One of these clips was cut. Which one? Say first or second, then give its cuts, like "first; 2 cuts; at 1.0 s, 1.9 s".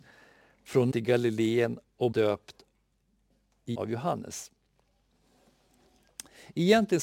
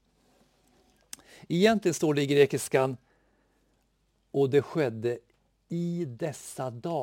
first; 3 cuts; at 0.9 s, 2.1 s, 3.7 s